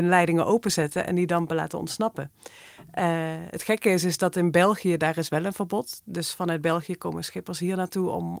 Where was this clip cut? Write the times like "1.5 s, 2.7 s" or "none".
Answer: none